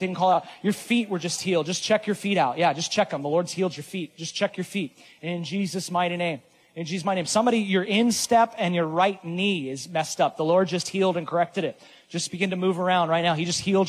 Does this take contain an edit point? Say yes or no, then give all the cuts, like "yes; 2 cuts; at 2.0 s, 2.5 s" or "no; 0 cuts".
no; 0 cuts